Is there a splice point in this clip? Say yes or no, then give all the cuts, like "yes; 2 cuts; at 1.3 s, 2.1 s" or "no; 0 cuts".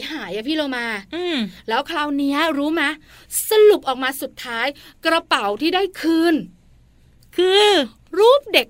no; 0 cuts